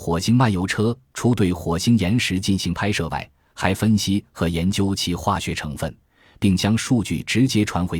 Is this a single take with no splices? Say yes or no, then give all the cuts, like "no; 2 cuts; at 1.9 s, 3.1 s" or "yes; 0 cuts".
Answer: yes; 0 cuts